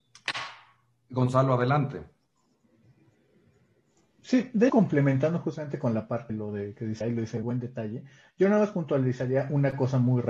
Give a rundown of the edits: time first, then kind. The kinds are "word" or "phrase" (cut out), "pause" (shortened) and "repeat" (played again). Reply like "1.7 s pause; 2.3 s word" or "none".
4.7 s word; 6.3 s word; 7.0 s word; 7.4 s word

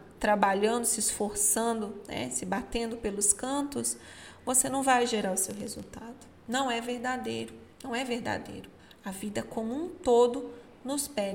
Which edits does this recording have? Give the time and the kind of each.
6.4 s pause; 7.7 s pause; 8.8 s pause

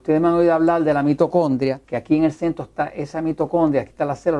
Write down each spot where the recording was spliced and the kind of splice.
1.8 s pause

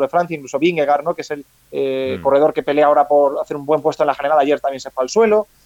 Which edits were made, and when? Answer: 1.5 s pause

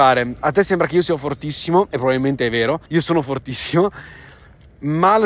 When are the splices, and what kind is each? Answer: 2.9 s pause

